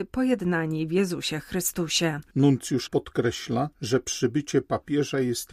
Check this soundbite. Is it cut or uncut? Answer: cut